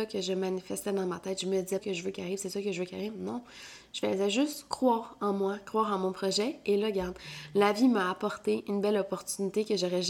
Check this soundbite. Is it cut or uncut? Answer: cut